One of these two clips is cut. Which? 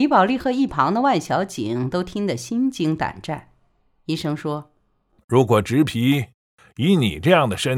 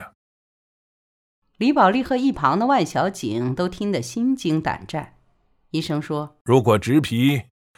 second; 1 cut; at 6.4 s

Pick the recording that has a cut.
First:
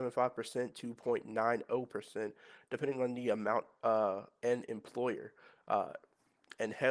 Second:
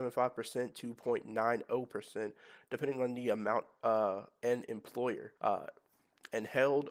second; 1 cut; at 5.4 s

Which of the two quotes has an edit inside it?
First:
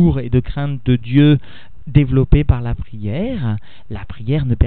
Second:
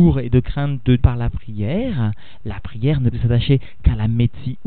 second; 2 cuts; at 1.0 s, 3.1 s

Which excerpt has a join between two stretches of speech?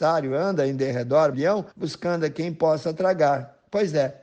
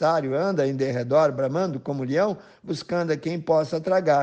first; 2 cuts; at 1.3 s, 1.7 s

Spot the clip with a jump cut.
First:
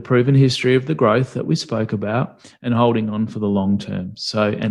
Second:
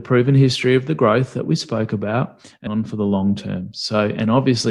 second; 1 cut; at 2.7 s

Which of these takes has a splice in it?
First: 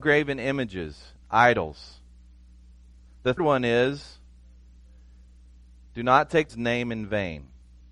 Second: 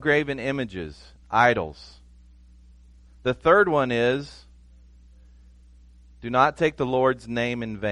first; 2 cuts; at 3.4 s, 6.5 s

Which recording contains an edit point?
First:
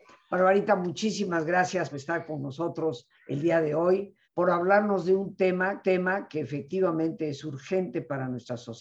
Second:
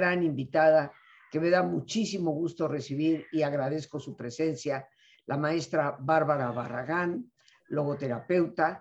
first; 4 cuts; at 1.9 s, 3.2 s, 4.2 s, 5.8 s

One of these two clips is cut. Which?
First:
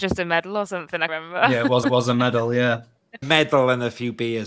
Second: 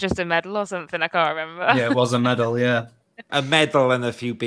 first; 3 cuts; at 1.1 s, 1.8 s, 3.2 s

